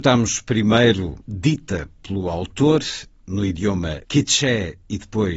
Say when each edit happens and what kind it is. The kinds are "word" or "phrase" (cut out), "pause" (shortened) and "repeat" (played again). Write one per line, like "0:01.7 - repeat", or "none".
0:01.2 - pause
0:04.0 - pause